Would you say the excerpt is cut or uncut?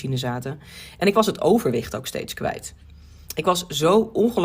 uncut